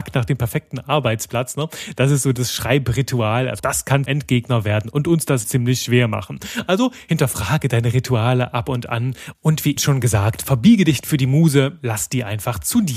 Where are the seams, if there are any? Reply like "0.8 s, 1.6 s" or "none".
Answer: 3.6 s, 4.1 s, 5.4 s, 9.8 s, 11.0 s